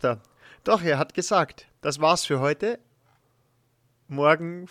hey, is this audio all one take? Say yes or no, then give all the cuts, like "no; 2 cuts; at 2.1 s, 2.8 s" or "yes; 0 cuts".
yes; 0 cuts